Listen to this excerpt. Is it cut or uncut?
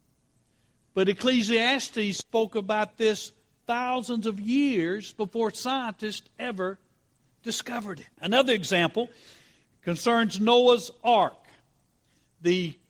cut